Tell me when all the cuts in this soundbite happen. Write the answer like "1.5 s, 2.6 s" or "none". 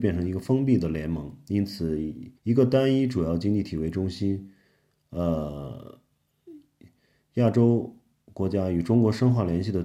2.4 s

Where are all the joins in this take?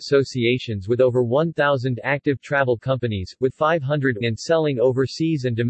3.5 s, 4.2 s

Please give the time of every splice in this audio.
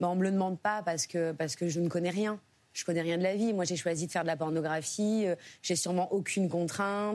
none

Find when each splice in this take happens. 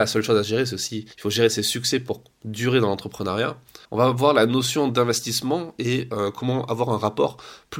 1.1 s, 3.8 s

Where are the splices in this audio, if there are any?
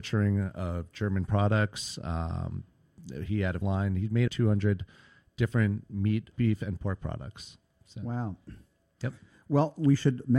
3.6 s, 4.3 s, 6.3 s

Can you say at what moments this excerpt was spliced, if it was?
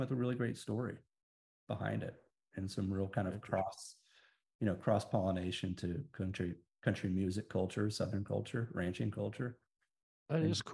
none

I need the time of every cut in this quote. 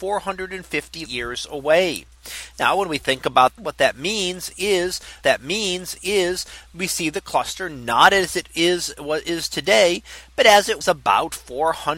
1.1 s, 3.6 s, 5.2 s, 10.8 s

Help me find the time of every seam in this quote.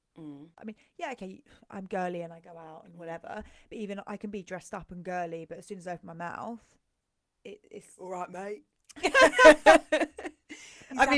none

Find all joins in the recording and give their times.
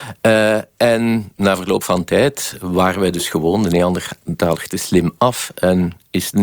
none

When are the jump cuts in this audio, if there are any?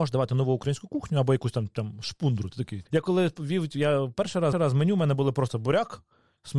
2.9 s, 4.5 s

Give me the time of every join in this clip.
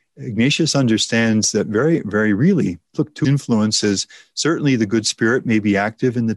3.2 s

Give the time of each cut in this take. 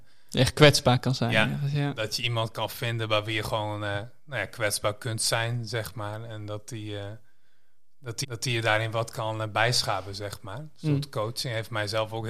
8.2 s

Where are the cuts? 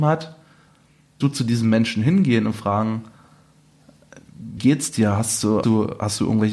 1.2 s, 4.6 s, 5.6 s

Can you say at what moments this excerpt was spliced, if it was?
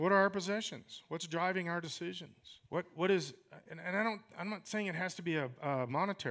2.7 s

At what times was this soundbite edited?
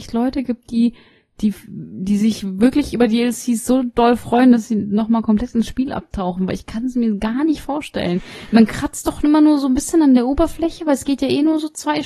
none

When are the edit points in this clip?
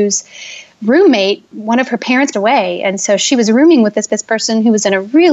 1.5 s, 2.3 s, 4.1 s

